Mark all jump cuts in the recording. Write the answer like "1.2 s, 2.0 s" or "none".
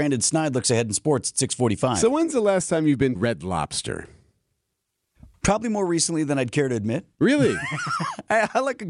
3.2 s

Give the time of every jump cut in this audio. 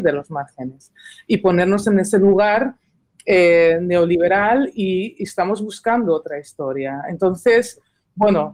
none

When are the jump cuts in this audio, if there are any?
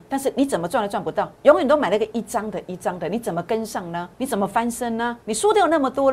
1.4 s, 4.1 s, 5.2 s

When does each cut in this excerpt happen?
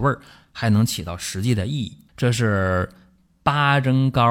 none

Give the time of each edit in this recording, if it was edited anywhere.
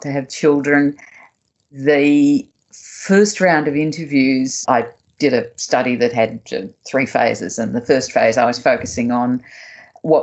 none

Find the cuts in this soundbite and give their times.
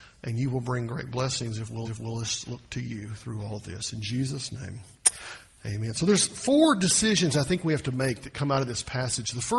1.8 s

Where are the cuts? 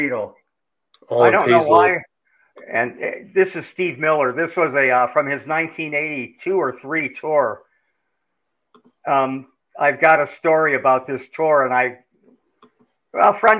none

